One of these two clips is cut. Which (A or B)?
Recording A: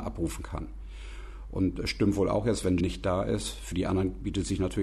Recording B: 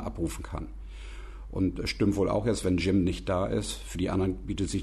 A